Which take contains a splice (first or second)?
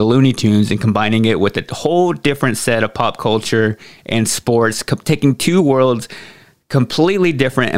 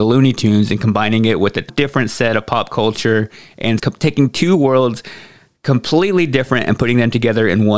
second